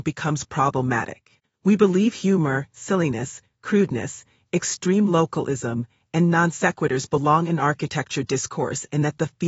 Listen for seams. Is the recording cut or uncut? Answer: uncut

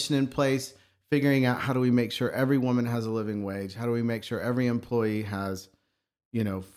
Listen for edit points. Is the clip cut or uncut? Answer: uncut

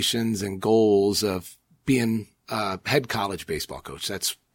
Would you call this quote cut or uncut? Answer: uncut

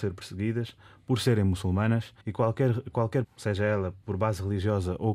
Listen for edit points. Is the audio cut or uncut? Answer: cut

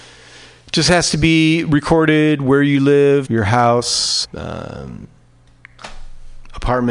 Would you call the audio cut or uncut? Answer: cut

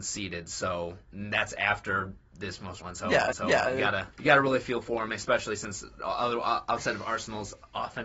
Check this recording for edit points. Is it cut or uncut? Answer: cut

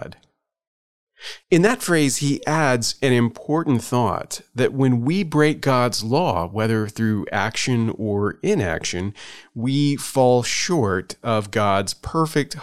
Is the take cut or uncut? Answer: cut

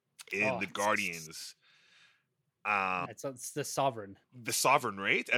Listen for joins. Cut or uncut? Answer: cut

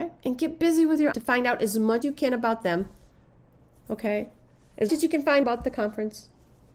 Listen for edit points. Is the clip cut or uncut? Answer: cut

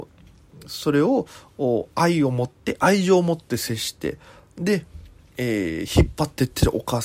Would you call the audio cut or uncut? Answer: uncut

